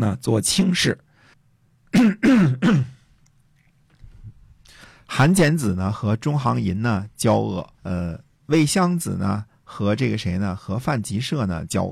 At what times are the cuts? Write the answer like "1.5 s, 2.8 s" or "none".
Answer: 1.3 s, 7.7 s

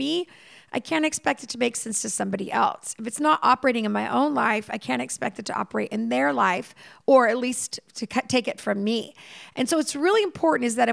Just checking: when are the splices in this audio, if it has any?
none

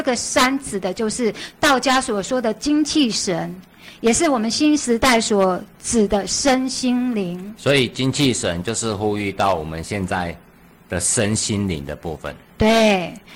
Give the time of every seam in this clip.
none

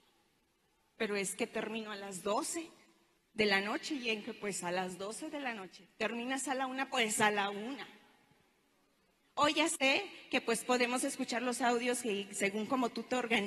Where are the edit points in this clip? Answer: 3.2 s

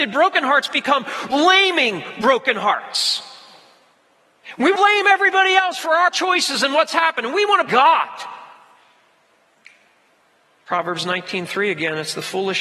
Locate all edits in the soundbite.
1.3 s, 4.7 s, 6.1 s, 7.7 s

